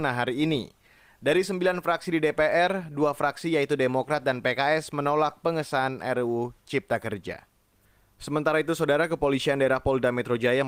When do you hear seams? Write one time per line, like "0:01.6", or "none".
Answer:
none